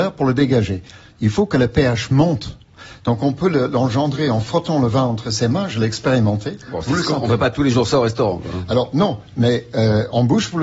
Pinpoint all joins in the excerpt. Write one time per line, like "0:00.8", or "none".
none

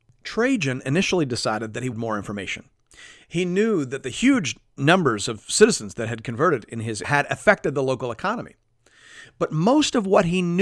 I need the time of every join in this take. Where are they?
0:01.9
0:07.0

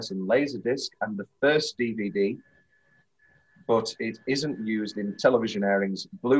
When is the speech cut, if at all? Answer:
none

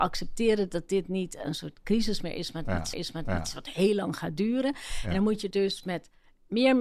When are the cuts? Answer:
0:02.9
0:05.5

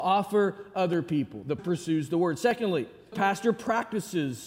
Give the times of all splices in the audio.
0:01.6
0:03.1

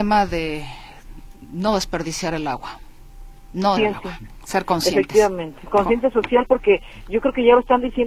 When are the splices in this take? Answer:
0:03.8

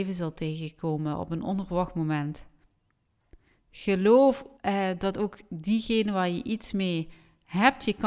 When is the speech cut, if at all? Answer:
0:04.6

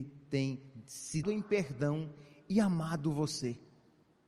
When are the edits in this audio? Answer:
0:01.2

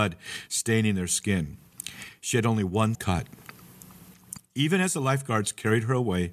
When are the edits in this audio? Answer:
0:02.9

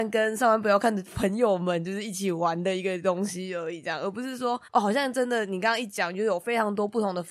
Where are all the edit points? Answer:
0:04.7

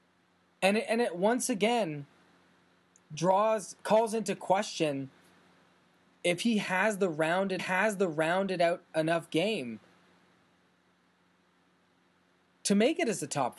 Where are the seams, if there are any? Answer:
0:03.8
0:07.6

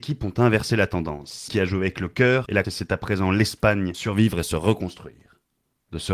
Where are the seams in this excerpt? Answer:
0:01.5
0:02.6
0:03.9

